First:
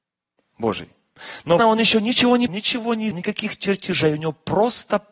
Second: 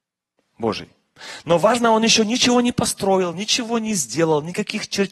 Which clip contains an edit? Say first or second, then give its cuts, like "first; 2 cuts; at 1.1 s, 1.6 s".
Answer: first; 3 cuts; at 1.6 s, 2.5 s, 3.1 s